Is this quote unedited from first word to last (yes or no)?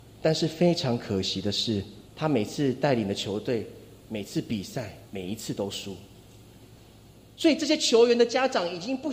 no